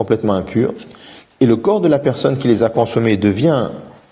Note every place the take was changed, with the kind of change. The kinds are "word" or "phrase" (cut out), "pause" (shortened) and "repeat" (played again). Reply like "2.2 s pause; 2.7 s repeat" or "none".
none